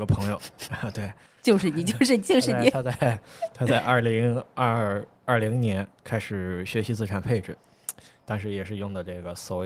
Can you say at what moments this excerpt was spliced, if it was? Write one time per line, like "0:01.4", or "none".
none